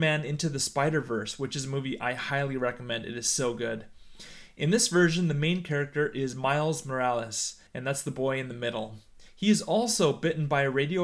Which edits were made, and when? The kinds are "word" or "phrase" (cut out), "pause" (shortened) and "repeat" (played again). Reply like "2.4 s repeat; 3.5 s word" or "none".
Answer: 7.7 s pause; 9.3 s pause